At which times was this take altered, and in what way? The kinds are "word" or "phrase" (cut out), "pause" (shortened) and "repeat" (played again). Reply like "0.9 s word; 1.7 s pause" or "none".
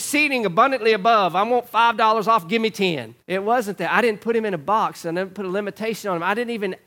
3.2 s pause